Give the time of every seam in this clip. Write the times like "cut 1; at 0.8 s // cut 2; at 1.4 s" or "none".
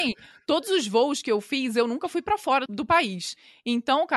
cut 1; at 2.7 s